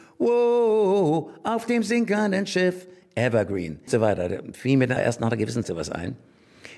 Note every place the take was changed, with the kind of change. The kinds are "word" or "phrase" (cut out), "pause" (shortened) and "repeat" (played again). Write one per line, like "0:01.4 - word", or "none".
0:03.9 - word
0:05.0 - word
0:05.6 - word